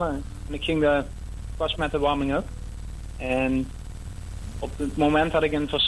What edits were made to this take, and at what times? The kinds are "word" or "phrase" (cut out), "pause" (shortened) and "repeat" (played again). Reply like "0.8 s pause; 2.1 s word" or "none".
1.8 s word